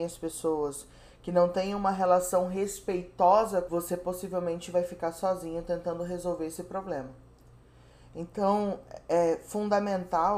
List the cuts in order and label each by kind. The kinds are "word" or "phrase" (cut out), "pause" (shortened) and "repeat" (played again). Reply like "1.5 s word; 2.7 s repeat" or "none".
3.7 s phrase